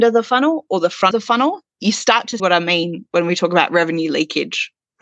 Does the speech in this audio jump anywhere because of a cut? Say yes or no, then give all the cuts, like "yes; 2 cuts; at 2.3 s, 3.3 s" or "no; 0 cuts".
yes; 2 cuts; at 1.1 s, 2.4 s